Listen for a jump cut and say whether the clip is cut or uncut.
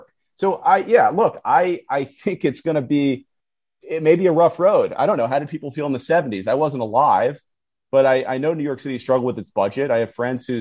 uncut